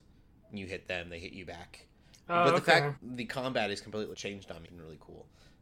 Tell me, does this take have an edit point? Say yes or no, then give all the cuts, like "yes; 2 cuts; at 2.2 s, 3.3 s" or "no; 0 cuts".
yes; 3 cuts; at 3.0 s, 4.1 s, 4.6 s